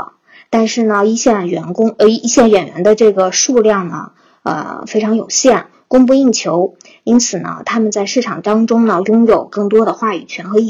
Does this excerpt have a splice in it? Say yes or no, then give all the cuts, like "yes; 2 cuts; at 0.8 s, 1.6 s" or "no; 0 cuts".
no; 0 cuts